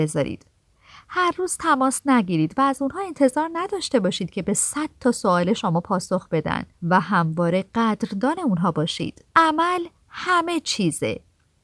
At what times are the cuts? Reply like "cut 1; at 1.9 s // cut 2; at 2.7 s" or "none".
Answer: cut 1; at 6.7 s // cut 2; at 9.3 s